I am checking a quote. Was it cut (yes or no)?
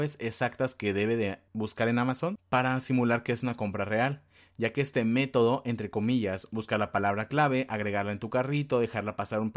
no